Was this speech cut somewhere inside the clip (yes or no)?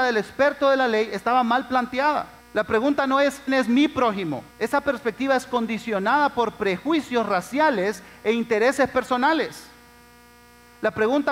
yes